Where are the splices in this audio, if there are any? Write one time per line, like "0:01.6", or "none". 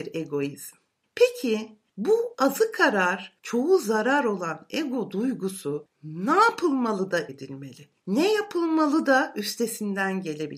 0:07.3